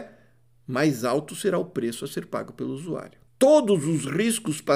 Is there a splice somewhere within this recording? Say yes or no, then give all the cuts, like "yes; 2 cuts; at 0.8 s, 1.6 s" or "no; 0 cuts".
yes; 1 cut; at 3.3 s